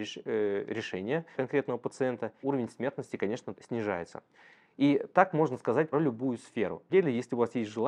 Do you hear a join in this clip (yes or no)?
yes